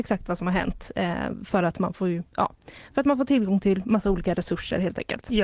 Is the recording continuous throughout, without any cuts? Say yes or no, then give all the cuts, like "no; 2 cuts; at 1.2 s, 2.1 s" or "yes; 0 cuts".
yes; 0 cuts